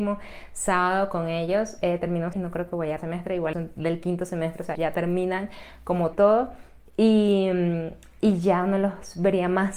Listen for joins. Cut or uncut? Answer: cut